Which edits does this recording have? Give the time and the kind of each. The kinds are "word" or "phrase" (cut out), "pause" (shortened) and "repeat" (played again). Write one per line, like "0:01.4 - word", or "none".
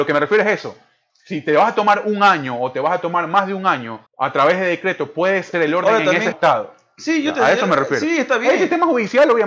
0:04.1 - pause
0:05.5 - word
0:06.3 - phrase